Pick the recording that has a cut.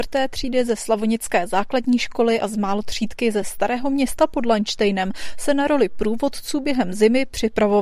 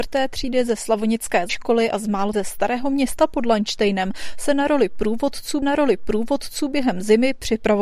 second; 3 cuts; at 1.5 s, 2.3 s, 5.6 s

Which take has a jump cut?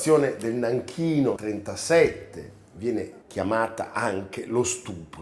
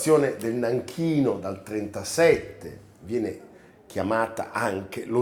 first; 2 cuts; at 1.4 s, 3.2 s

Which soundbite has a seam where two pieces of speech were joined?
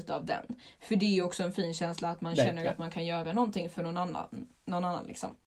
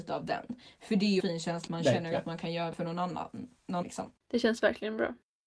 second; 5 cuts; at 1.2 s, 1.7 s, 2.7 s, 3.8 s, 4.2 s

